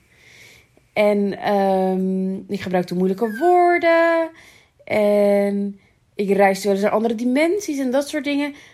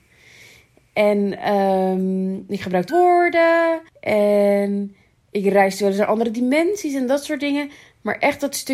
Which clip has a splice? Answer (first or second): second